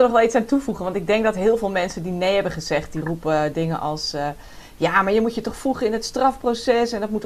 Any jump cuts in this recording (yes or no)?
no